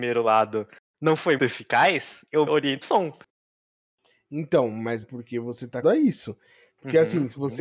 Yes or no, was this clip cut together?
yes